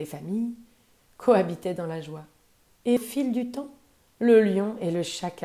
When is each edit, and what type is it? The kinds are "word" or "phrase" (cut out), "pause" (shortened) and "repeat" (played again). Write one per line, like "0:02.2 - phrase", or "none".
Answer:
0:03.0 - word